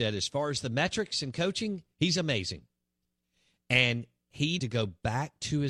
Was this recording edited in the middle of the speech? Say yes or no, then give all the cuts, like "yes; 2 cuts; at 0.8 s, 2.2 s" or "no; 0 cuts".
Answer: yes; 1 cut; at 4.6 s